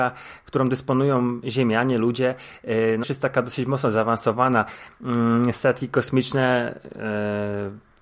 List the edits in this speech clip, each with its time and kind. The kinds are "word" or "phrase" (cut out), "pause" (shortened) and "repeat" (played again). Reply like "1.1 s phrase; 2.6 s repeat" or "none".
3.0 s word